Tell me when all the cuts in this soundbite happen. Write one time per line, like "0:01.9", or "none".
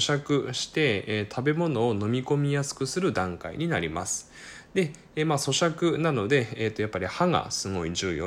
none